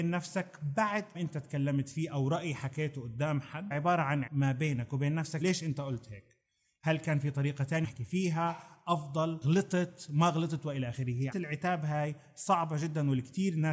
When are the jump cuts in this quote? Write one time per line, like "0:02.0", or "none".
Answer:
0:01.1
0:03.7
0:04.3
0:05.4
0:07.8
0:11.3